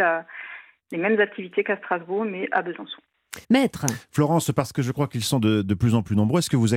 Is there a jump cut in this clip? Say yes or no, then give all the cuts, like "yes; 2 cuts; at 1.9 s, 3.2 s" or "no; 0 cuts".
yes; 1 cut; at 3.4 s